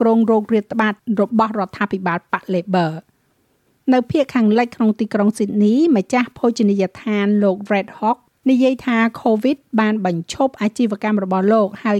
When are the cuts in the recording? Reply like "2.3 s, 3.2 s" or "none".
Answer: none